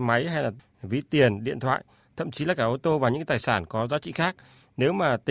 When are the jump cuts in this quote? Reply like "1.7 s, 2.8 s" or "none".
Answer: none